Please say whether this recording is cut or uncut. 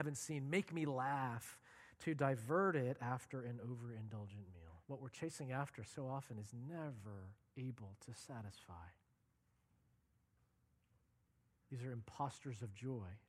cut